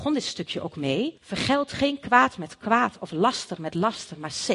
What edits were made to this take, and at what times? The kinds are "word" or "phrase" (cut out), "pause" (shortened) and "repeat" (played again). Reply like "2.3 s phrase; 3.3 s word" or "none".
1.2 s pause